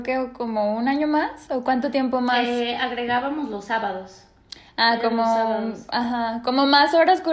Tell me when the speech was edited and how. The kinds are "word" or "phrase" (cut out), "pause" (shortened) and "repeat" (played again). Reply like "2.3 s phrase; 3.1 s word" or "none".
none